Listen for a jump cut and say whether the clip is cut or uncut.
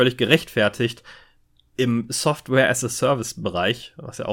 uncut